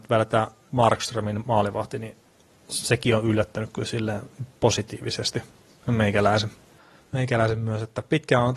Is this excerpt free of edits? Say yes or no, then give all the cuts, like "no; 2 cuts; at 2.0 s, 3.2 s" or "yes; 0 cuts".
yes; 0 cuts